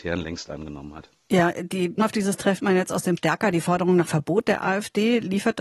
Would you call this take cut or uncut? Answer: cut